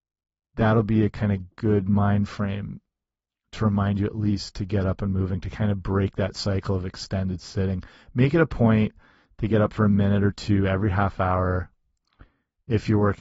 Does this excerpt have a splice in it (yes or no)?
no